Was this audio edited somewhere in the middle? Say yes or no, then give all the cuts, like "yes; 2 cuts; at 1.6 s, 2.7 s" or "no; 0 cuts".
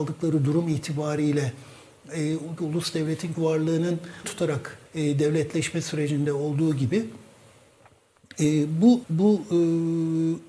yes; 5 cuts; at 2.6 s, 3.3 s, 4.2 s, 4.9 s, 9.0 s